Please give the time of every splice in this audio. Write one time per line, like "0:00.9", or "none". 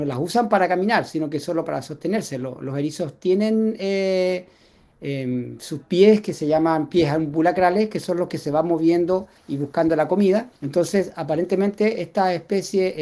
0:09.4
0:10.6